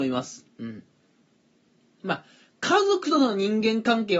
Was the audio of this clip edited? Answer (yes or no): no